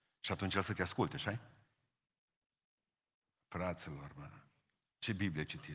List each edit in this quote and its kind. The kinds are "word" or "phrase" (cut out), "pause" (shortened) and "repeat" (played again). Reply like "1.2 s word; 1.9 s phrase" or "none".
none